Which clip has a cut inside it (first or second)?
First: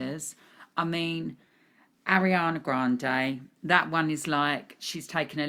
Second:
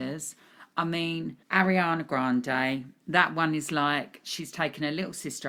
second